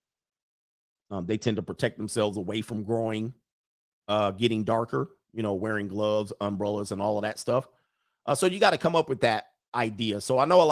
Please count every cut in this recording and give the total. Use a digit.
0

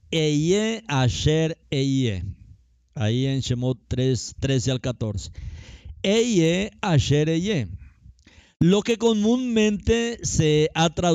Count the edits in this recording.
0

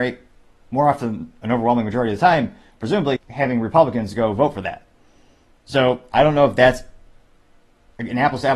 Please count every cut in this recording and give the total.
1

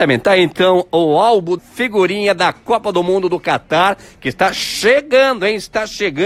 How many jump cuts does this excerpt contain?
1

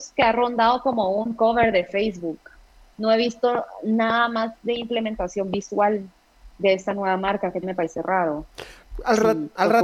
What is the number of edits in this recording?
1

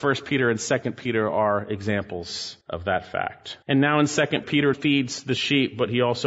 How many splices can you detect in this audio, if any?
4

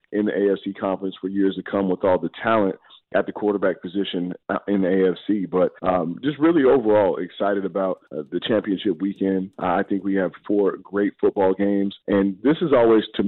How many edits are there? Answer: 3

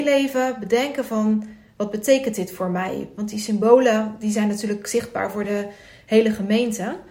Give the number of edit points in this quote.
0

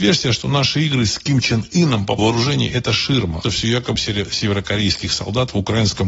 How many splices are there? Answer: 3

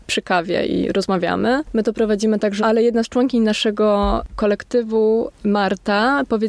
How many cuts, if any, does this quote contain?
2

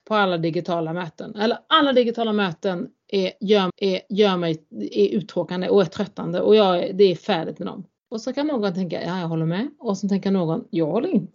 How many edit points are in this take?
2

